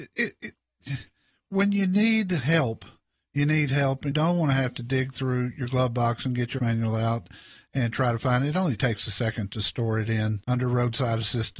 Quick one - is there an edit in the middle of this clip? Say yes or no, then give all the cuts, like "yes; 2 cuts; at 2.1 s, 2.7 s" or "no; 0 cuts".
yes; 3 cuts; at 4.1 s, 6.6 s, 10.4 s